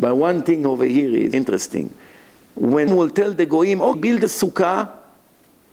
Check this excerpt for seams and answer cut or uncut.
cut